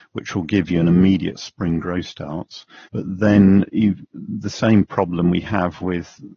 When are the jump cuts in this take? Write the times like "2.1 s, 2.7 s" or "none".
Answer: 1.3 s, 2.8 s